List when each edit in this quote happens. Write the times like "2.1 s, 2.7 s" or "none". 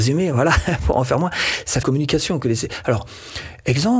1.8 s